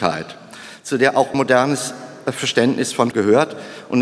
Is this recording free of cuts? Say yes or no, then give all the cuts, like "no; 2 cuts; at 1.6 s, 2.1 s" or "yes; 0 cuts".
no; 2 cuts; at 1.3 s, 3.1 s